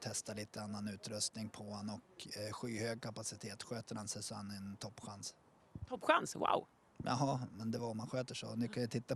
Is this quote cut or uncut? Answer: uncut